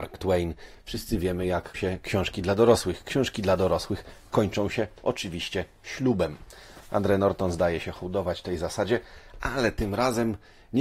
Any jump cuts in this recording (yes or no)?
yes